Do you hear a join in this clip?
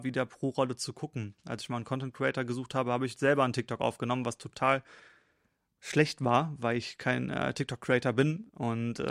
no; 0 cuts

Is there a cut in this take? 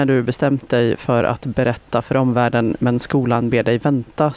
no; 0 cuts

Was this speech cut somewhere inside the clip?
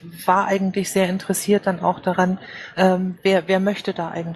no; 0 cuts

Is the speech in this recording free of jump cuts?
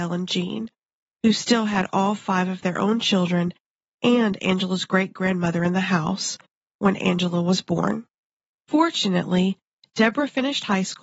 yes; 0 cuts

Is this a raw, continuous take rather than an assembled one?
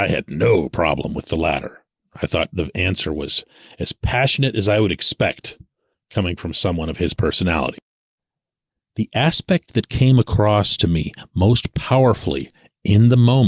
yes; 0 cuts

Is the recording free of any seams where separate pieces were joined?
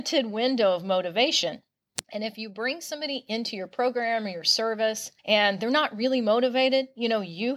no; 2 cuts; at 2.0 s, 5.2 s

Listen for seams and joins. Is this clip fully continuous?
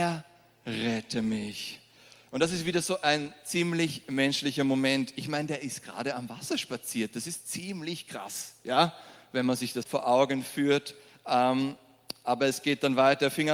no; 1 cut; at 9.8 s

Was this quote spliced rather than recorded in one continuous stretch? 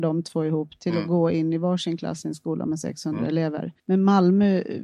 yes; 1 cut; at 3.8 s

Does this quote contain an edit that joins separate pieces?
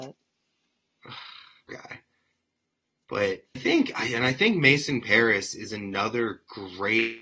yes; 2 cuts; at 1.7 s, 3.5 s

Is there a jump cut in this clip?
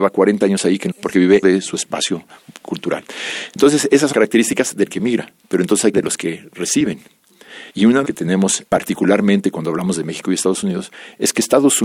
yes; 8 cuts; at 0.9 s, 1.4 s, 4.1 s, 5.4 s, 5.9 s, 7.7 s, 8.0 s, 8.7 s

